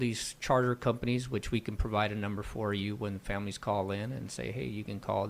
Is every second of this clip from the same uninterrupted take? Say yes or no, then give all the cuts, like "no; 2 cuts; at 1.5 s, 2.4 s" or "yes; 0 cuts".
yes; 0 cuts